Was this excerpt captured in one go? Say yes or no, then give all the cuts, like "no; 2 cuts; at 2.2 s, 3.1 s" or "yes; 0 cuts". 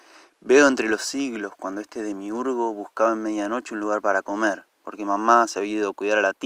no; 1 cut; at 4.7 s